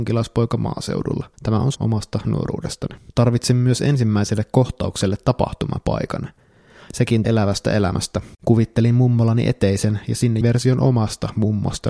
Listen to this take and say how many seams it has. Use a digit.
6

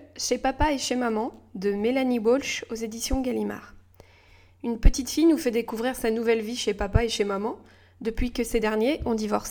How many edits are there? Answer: 0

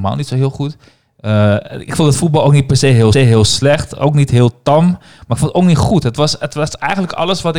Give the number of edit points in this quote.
1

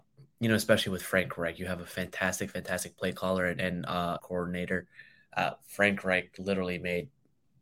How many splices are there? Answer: 1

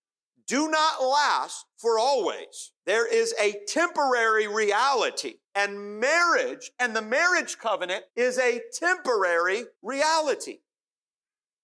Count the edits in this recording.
5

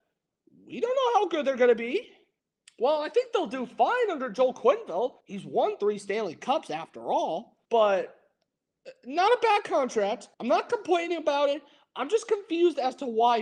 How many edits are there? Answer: 4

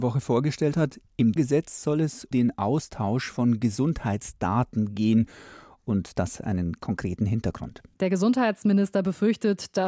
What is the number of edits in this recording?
4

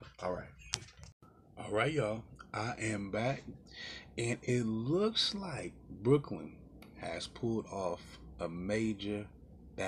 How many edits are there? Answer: 0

